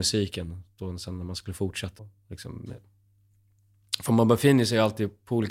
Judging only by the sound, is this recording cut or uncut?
cut